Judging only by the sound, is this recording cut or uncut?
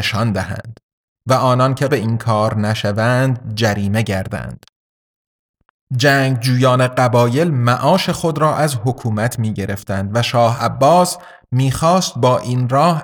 cut